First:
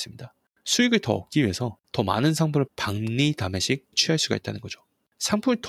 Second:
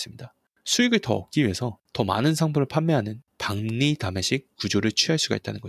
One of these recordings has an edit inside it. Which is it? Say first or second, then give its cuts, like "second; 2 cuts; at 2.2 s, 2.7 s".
first; 2 cuts; at 2.7 s, 3.9 s